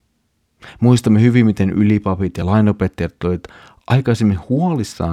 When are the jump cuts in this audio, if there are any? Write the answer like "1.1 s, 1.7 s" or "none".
none